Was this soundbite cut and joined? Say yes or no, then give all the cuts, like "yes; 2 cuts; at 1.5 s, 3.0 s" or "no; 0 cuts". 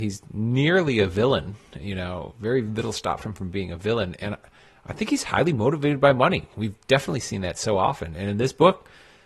no; 0 cuts